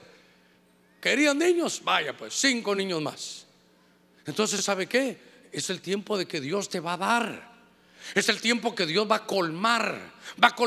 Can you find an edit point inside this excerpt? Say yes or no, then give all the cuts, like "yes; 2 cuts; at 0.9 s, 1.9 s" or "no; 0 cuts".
no; 0 cuts